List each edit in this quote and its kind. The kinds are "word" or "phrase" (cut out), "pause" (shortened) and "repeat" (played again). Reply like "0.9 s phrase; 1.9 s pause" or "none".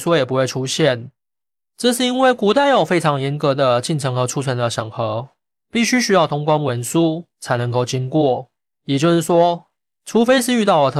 none